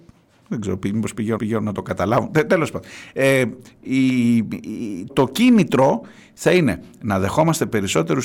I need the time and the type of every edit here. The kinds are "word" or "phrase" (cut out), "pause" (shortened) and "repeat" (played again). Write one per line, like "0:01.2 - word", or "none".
0:01.4 - repeat
0:05.1 - word